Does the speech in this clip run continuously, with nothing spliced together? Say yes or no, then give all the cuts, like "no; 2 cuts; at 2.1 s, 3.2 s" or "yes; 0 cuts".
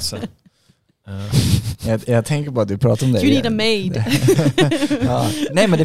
yes; 0 cuts